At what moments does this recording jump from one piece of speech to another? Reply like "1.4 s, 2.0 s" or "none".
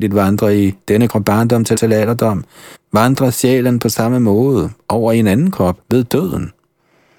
1.1 s, 1.8 s, 2.7 s, 5.8 s